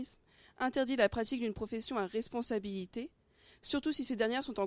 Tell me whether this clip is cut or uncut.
uncut